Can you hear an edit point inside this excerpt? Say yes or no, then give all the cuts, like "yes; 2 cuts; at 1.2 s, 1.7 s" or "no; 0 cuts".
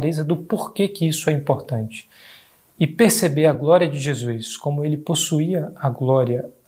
no; 0 cuts